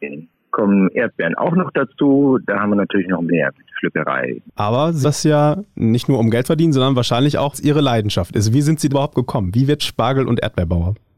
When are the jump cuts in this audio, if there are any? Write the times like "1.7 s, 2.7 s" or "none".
3.3 s, 5.0 s, 6.4 s, 7.5 s, 8.9 s, 9.8 s